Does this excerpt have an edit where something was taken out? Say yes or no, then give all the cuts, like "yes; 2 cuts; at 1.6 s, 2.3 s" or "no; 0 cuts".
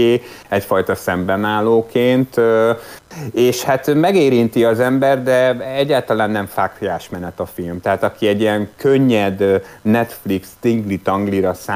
no; 0 cuts